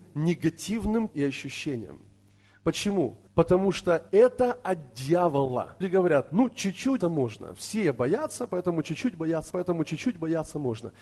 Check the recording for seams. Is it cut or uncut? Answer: cut